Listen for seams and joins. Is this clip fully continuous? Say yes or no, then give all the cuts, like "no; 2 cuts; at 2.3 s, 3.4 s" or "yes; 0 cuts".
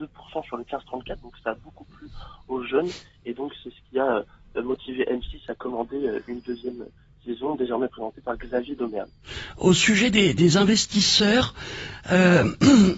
yes; 0 cuts